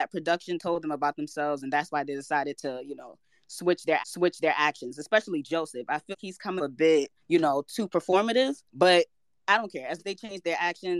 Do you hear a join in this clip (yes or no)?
yes